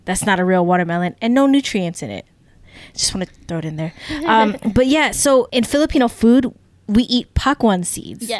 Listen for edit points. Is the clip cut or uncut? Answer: uncut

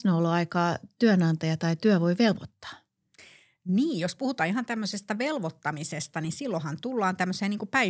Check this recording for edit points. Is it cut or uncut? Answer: uncut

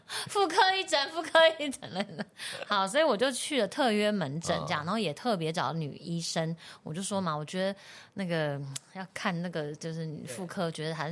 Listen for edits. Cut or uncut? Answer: uncut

